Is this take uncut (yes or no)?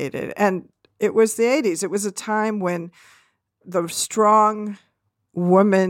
yes